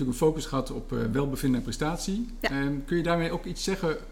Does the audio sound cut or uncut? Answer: uncut